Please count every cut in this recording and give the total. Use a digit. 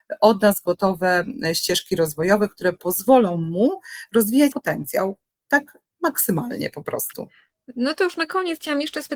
1